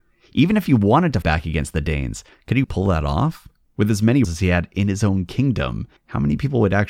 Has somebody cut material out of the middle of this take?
yes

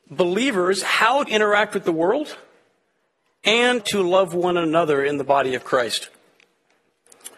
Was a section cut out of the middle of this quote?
yes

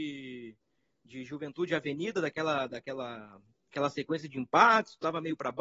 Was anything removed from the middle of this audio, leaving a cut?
no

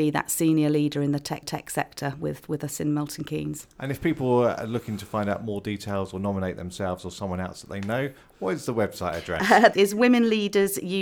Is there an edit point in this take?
yes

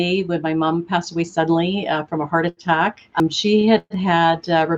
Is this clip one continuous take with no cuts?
yes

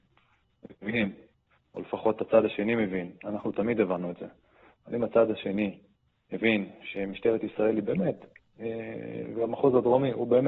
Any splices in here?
no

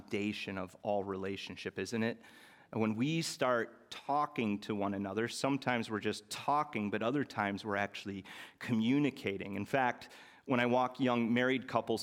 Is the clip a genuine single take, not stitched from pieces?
yes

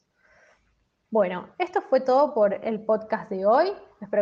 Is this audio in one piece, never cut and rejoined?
yes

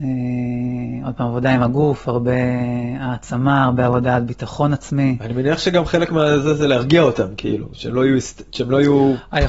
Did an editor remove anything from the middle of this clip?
no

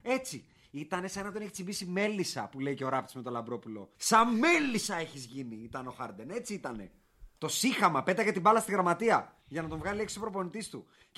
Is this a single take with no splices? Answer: no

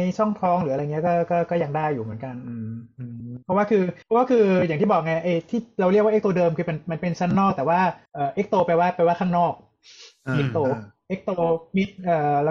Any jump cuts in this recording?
yes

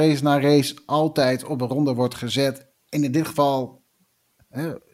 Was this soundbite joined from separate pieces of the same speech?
no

